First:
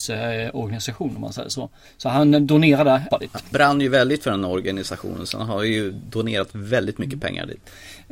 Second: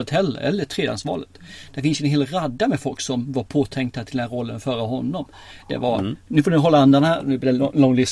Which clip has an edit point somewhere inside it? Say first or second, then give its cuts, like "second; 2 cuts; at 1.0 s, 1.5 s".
first; 3 cuts; at 1.9 s, 3.1 s, 3.5 s